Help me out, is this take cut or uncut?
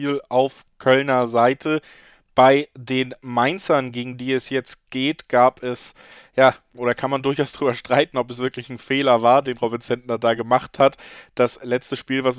uncut